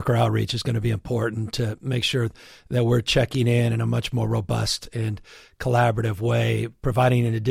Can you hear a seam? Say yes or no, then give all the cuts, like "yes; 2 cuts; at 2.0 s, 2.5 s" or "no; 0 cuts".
no; 0 cuts